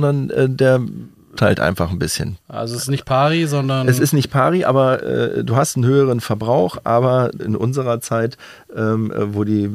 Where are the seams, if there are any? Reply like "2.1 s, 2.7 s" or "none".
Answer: 1.4 s, 2.4 s, 5.0 s, 7.4 s